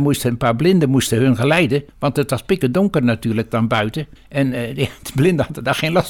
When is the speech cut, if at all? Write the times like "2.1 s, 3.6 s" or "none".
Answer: 1.9 s, 4.2 s